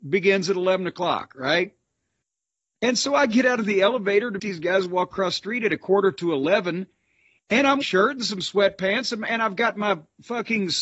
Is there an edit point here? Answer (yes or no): yes